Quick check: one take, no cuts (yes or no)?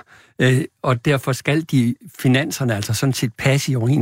yes